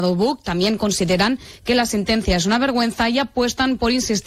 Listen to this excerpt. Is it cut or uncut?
uncut